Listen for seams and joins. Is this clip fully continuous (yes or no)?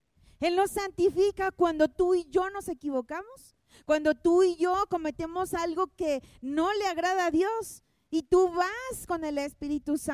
yes